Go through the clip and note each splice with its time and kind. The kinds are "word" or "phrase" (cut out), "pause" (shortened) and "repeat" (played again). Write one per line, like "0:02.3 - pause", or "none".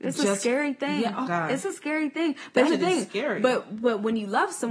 0:01.2 - word
0:02.7 - word

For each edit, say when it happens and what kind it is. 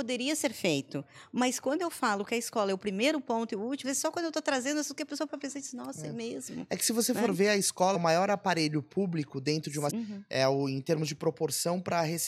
0:03.8 - word
0:05.3 - word
0:07.9 - word
0:09.9 - word

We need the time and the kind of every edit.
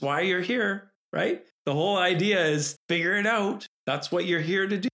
0:01.6 - word
0:02.7 - word

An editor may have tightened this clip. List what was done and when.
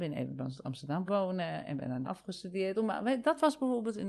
0:01.1 - word
0:02.0 - word

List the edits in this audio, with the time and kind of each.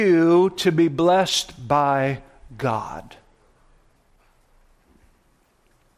none

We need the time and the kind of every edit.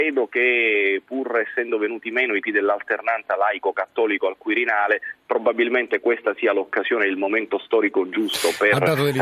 0:02.4 - word

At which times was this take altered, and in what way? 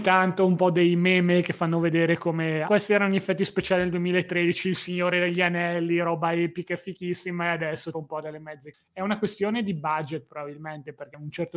0:02.6 - word
0:07.9 - word

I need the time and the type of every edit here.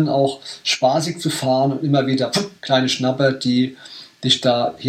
0:02.6 - pause

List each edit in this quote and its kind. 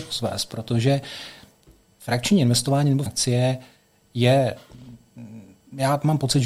0:03.1 - word

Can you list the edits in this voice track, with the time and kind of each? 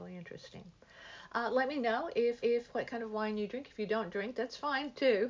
0:02.4 - repeat

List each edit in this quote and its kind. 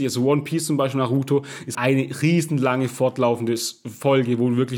0:01.7 - word

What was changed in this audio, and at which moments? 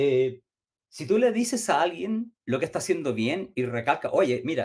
0:02.4 - pause
0:03.5 - word

